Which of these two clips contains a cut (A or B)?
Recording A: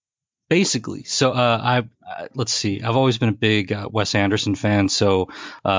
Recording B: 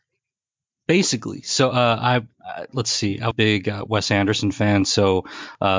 B